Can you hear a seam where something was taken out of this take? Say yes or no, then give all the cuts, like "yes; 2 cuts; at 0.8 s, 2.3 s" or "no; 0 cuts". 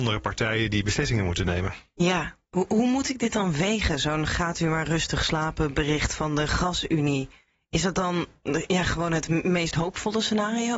no; 0 cuts